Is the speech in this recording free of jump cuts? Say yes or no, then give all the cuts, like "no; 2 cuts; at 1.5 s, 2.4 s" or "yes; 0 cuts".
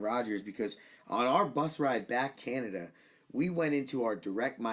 no; 1 cut; at 2.3 s